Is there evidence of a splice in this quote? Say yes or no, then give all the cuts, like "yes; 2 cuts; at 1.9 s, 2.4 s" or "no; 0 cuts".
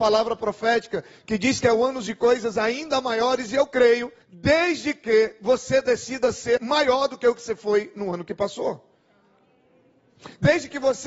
yes; 2 cuts; at 4.2 s, 6.6 s